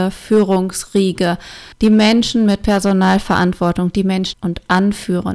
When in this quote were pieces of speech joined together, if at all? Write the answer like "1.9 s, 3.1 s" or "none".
1.7 s, 4.3 s